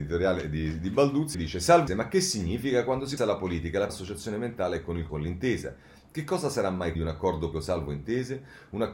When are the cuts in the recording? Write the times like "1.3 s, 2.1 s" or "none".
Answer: 1.3 s, 1.9 s, 3.2 s, 3.9 s, 5.1 s, 6.9 s, 7.5 s